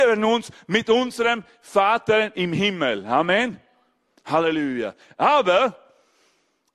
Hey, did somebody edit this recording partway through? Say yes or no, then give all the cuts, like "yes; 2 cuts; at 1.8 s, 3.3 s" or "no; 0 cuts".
no; 0 cuts